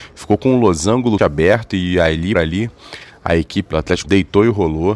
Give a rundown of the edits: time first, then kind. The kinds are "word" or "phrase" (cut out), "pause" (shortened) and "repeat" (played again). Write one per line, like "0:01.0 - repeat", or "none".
0:01.2 - word
0:02.3 - word
0:03.7 - word
0:04.0 - word